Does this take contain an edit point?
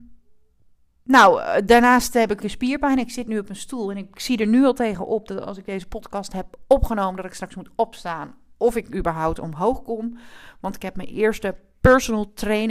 yes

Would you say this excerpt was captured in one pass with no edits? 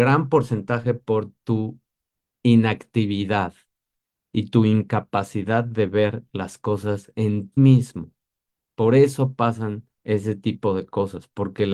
no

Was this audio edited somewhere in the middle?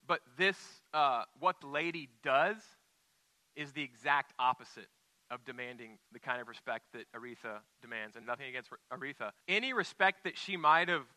yes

